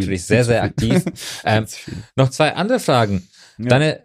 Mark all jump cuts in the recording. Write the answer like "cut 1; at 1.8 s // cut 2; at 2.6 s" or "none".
none